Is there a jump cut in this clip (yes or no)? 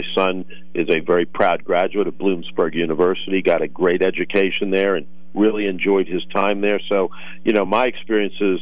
no